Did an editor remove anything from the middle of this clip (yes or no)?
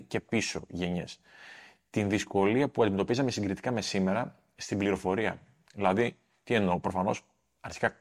no